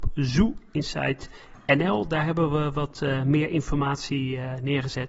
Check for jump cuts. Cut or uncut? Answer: uncut